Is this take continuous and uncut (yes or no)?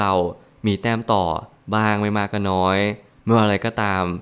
yes